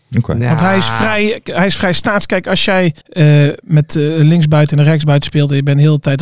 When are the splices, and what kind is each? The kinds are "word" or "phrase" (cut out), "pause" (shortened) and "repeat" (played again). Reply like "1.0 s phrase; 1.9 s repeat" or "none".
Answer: 3.0 s pause